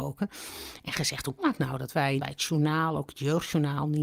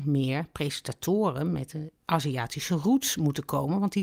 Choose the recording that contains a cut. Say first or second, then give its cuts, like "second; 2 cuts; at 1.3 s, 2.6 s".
first; 2 cuts; at 1.4 s, 2.2 s